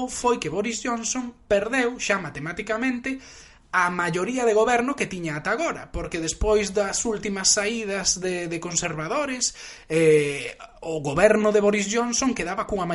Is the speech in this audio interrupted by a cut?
no; 0 cuts

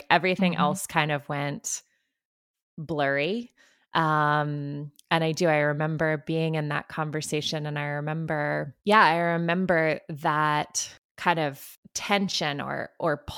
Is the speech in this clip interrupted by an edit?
yes; 1 cut; at 8.8 s

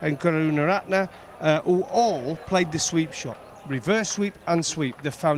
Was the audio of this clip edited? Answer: no; 0 cuts

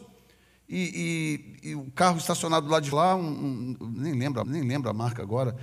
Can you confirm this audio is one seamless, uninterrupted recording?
no; 2 cuts; at 2.9 s, 4.4 s

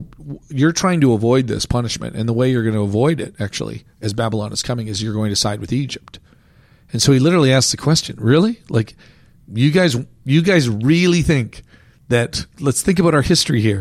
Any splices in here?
no; 0 cuts

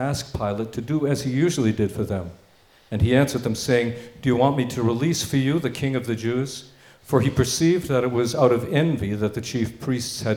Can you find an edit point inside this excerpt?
no; 0 cuts

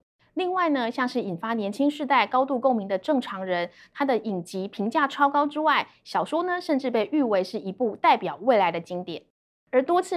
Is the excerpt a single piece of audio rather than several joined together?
yes; 0 cuts

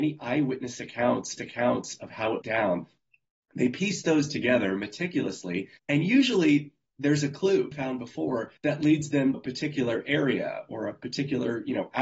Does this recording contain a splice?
yes; 6 cuts; at 1.4 s, 2.4 s, 5.8 s, 7.7 s, 8.6 s, 9.3 s

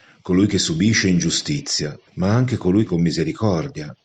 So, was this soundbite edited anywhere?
yes; 2 cuts; at 2.1 s, 2.9 s

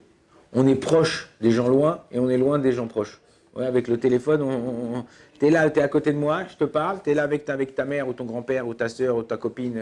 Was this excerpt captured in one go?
yes; 0 cuts

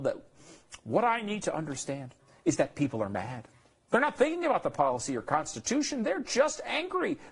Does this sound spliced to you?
no; 0 cuts

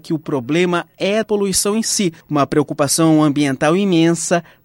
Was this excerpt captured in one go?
no; 2 cuts; at 1.2 s, 2.2 s

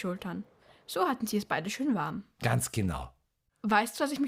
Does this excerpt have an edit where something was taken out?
no; 0 cuts

